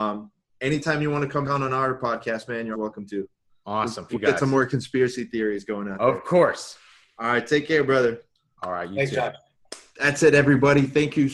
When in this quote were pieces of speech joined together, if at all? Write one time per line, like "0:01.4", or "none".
0:01.4
0:02.7
0:04.1